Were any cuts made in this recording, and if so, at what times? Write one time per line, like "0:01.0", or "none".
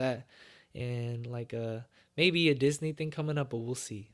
none